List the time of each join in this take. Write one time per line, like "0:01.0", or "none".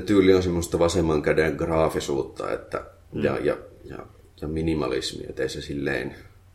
none